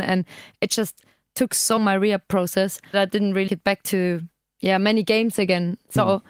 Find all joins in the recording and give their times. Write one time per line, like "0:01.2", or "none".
0:01.8
0:02.9
0:03.5